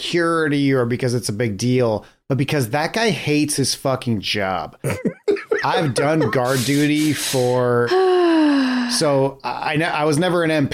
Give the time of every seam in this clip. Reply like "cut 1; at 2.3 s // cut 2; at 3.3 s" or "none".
none